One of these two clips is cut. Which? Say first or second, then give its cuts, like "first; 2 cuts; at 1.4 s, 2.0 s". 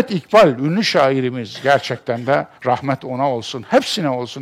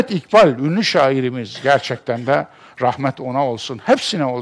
first; 1 cut; at 2.5 s